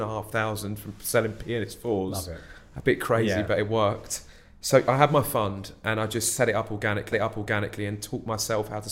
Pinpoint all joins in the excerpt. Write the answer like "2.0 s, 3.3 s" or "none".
7.1 s